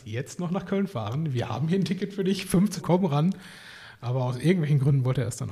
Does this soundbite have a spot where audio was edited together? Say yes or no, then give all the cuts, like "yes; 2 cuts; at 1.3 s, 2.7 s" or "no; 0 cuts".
yes; 1 cut; at 2.8 s